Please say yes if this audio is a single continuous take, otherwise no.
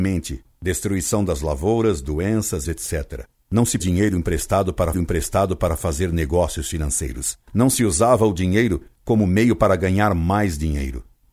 no